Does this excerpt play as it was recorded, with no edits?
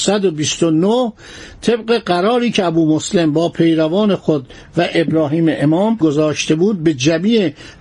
yes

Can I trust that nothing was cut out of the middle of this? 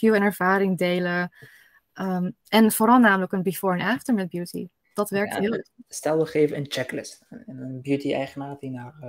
yes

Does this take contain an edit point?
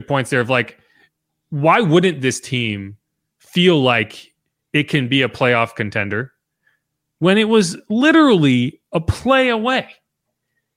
no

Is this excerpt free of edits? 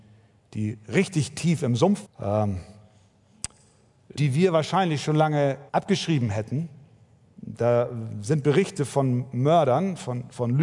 no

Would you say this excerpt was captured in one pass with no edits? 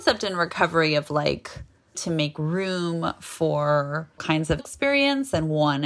no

